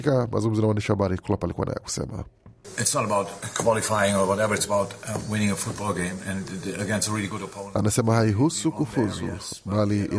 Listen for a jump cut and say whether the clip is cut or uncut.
uncut